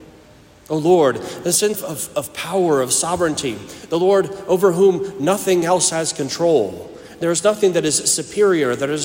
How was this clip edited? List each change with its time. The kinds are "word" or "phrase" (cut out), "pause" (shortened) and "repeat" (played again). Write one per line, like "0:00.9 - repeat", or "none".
0:01.7 - word